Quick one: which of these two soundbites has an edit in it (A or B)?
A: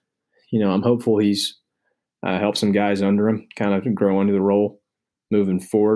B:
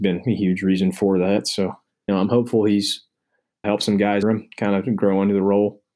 B